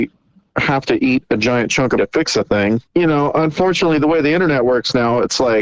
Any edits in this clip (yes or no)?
yes